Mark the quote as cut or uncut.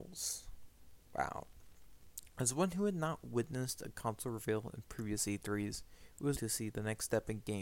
cut